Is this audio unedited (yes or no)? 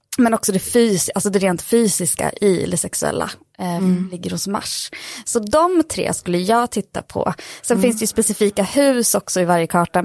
yes